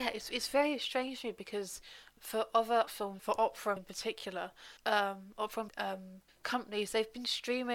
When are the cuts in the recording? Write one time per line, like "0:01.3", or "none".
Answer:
0:02.2
0:02.9
0:03.2
0:03.8
0:04.8
0:05.7
0:06.3